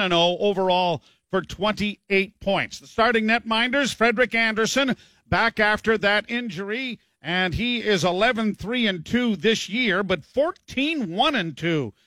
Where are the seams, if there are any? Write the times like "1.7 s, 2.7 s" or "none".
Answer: none